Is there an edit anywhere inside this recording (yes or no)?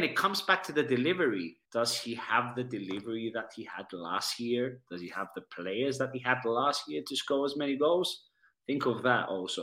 yes